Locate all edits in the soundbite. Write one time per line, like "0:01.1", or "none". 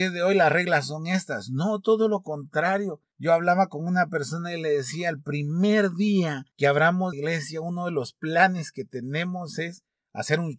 0:07.1